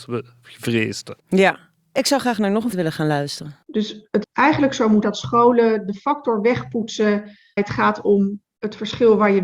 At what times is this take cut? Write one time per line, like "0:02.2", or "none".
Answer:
0:01.2
0:02.7
0:03.6
0:04.2
0:05.0
0:07.6